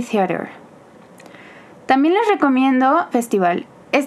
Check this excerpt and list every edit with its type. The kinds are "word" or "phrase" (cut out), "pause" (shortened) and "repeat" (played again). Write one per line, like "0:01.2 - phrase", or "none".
0:03.1 - word

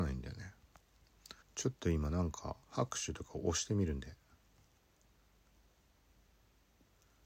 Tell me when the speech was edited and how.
0:01.4 - pause
0:02.6 - pause

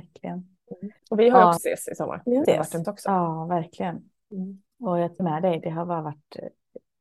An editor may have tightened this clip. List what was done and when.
0:01.0 - pause
0:01.6 - word
0:02.4 - word
0:02.8 - word
0:04.7 - pause
0:05.2 - word

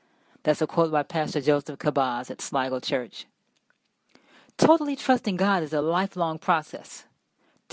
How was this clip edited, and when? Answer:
none

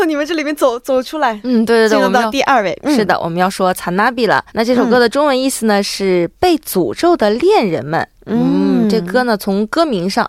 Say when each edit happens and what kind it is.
0:04.5 - pause

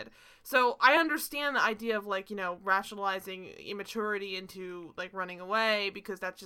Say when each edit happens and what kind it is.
none

